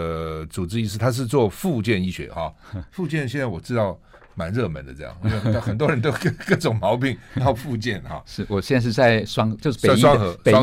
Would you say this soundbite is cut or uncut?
uncut